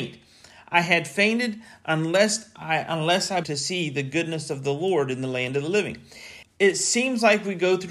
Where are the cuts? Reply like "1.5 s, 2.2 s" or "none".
3.4 s, 6.4 s